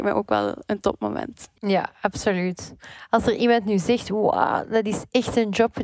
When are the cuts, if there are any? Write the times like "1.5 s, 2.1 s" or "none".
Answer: 1.6 s